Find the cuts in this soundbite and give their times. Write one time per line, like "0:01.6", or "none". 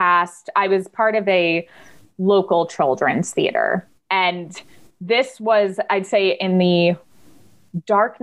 none